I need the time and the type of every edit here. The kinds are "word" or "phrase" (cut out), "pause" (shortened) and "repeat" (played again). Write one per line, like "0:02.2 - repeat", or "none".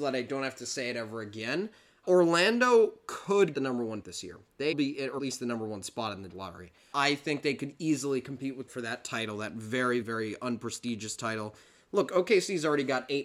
0:02.0 - word
0:03.5 - word
0:04.0 - word
0:04.7 - word
0:05.2 - word
0:06.3 - word
0:06.9 - word
0:08.7 - word
0:10.0 - word